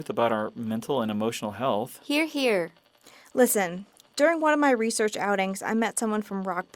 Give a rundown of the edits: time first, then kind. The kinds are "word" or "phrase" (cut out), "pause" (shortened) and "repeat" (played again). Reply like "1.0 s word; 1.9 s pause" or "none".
none